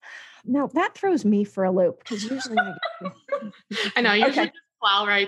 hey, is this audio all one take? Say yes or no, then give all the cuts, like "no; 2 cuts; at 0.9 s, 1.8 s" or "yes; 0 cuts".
yes; 0 cuts